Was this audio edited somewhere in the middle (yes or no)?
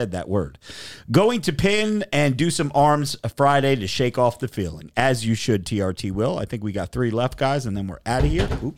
no